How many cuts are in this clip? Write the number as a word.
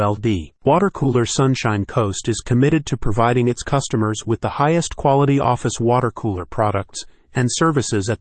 zero